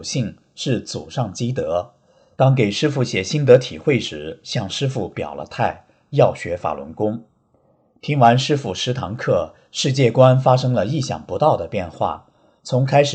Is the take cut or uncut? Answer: uncut